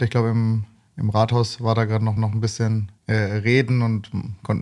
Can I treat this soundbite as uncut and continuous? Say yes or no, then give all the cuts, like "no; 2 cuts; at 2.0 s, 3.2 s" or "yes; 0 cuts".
no; 2 cuts; at 2.2 s, 3.0 s